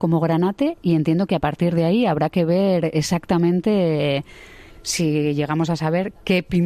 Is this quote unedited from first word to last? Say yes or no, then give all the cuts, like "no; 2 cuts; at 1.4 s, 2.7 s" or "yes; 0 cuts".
yes; 0 cuts